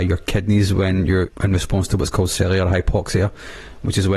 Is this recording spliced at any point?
no; 0 cuts

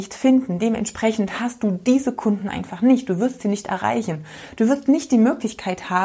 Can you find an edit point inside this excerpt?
no; 0 cuts

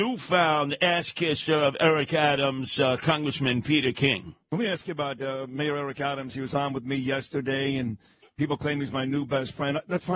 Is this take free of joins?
yes; 0 cuts

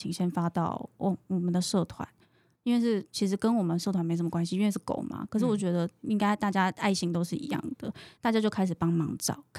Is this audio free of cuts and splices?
yes; 0 cuts

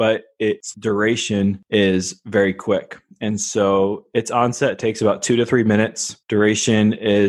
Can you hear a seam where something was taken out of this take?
no; 0 cuts

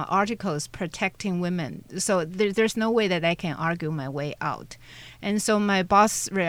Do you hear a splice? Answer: no; 0 cuts

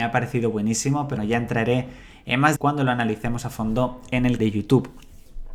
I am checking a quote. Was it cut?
yes; 3 cuts; at 1.2 s, 2.6 s, 4.4 s

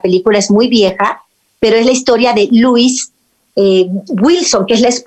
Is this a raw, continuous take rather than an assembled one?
yes; 0 cuts

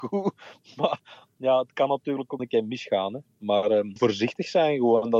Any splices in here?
yes; 2 cuts; at 2.4 s, 4.0 s

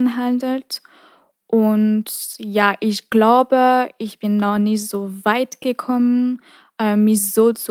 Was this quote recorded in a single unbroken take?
yes; 0 cuts

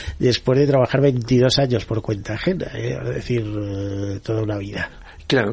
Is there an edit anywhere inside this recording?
no; 0 cuts

